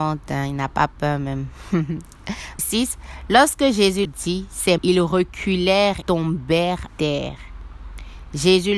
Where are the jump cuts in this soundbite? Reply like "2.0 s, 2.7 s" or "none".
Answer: 2.6 s, 4.0 s, 4.8 s, 6.0 s, 6.9 s